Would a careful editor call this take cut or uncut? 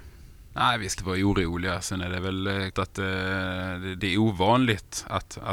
cut